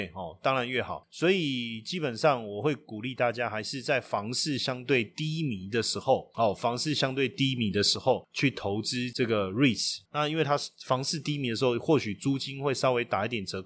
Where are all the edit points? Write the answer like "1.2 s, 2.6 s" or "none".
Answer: none